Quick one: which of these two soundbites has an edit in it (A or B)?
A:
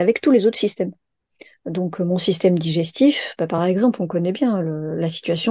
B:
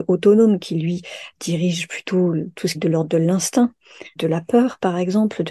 B